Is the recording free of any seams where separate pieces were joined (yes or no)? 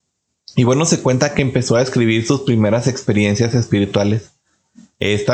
yes